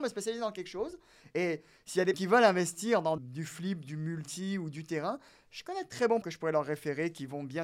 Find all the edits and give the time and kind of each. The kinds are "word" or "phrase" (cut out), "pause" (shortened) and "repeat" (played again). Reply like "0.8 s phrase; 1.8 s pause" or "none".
2.1 s word; 3.2 s word; 6.2 s word